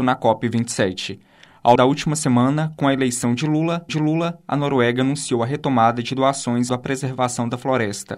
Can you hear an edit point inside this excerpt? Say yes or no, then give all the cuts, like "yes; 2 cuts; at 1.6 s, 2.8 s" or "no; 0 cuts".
yes; 3 cuts; at 1.8 s, 3.9 s, 6.7 s